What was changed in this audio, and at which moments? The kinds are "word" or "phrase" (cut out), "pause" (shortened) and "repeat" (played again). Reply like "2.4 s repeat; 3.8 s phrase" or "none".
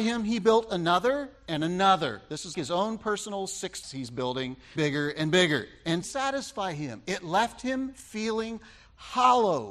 1.4 s phrase; 2.5 s word; 3.8 s word; 4.8 s phrase; 6.0 s phrase